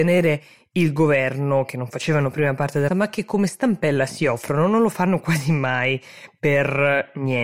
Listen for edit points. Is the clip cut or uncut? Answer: cut